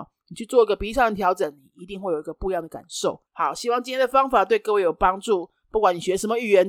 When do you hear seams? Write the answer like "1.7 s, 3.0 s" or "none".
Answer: 3.3 s